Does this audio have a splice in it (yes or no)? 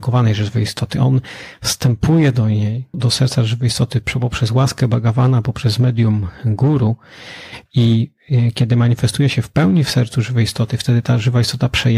yes